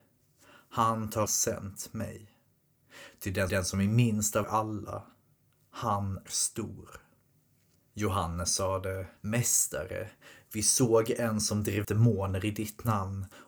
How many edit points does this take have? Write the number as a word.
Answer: six